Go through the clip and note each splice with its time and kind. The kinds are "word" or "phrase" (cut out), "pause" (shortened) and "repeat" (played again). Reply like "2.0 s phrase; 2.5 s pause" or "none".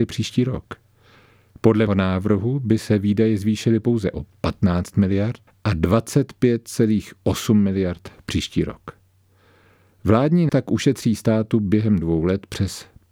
1.9 s word; 5.5 s word; 10.5 s word

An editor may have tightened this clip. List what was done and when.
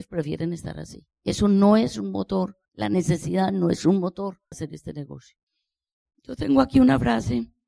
1.1 s pause; 2.7 s pause; 4.5 s word

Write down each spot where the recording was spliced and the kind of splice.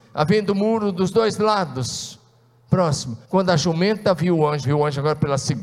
3.2 s pause; 4.6 s word

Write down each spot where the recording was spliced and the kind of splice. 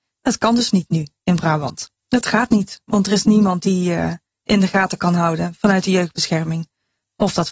2.0 s pause

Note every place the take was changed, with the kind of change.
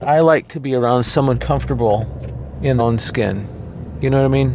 1.3 s word; 2.8 s word

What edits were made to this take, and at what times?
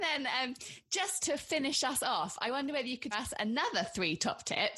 1.2 s word; 3.1 s word

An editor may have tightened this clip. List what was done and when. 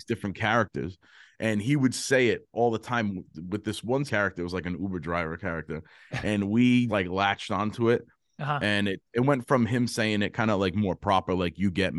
4.1 s word; 6.9 s word

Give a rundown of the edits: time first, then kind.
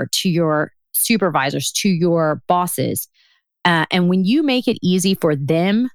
none

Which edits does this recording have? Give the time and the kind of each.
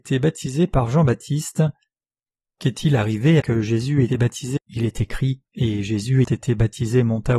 3.4 s word; 4.1 s word; 4.6 s word; 5.5 s pause; 6.2 s word

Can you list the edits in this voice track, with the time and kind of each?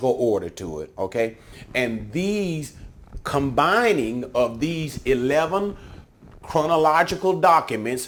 none

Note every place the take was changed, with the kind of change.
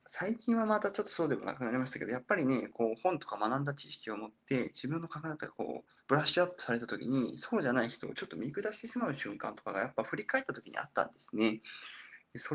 6.0 s pause

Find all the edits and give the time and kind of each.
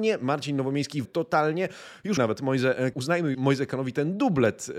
1.0 s word; 2.2 s word; 2.9 s word; 3.3 s word

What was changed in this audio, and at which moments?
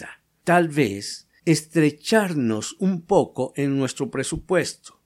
1.4 s pause

